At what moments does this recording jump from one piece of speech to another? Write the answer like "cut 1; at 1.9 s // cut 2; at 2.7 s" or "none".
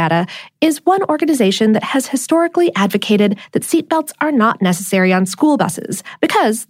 none